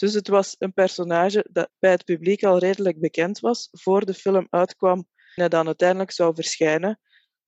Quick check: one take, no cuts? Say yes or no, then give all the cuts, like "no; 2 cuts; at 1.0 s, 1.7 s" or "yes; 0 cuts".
no; 2 cuts; at 1.7 s, 5.4 s